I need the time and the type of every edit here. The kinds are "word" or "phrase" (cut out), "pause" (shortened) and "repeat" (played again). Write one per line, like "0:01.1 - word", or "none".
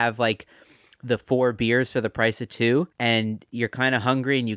0:02.9 - pause